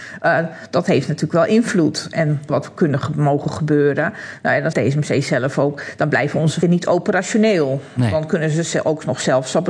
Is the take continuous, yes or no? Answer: no